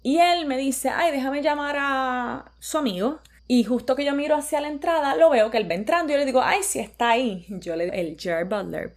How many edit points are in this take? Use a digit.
2